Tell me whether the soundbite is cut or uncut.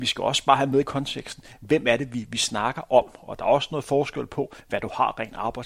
uncut